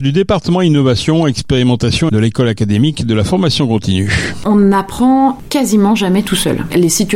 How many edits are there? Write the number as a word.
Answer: one